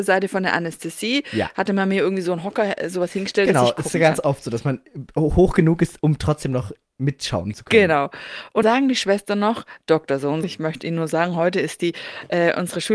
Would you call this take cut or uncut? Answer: cut